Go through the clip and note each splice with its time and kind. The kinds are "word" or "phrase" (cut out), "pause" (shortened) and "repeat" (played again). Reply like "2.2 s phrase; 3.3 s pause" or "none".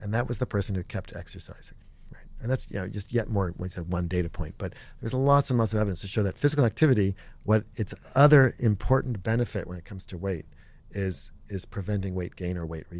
none